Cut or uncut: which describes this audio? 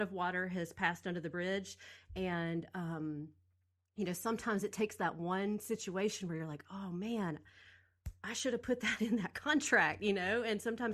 uncut